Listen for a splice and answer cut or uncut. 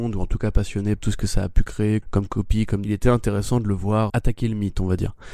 cut